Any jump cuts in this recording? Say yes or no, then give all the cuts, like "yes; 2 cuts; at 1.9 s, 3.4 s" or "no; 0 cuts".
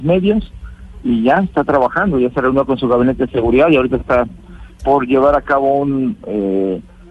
no; 0 cuts